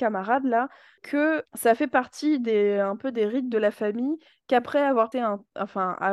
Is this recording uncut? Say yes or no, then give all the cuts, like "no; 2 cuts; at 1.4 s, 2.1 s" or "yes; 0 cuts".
no; 1 cut; at 5.1 s